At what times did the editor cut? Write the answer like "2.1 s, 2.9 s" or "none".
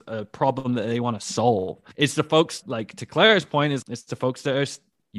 1.9 s, 2.6 s, 3.8 s